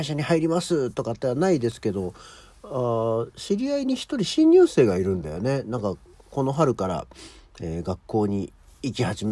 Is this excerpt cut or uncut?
uncut